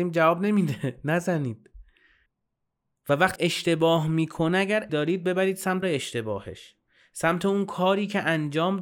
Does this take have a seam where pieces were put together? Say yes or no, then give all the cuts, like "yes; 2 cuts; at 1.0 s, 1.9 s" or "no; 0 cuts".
yes; 4 cuts; at 2.3 s, 3.4 s, 4.9 s, 5.8 s